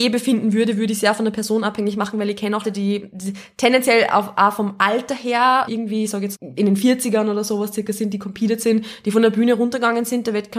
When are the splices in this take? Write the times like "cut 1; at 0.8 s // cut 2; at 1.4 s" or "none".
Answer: cut 1; at 2.6 s // cut 2; at 5.7 s // cut 3; at 6.3 s